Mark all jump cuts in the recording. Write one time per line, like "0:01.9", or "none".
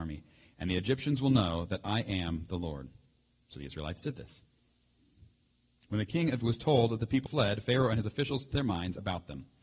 0:06.4
0:07.3
0:08.5